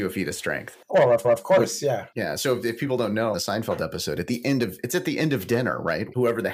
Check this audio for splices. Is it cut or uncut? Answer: cut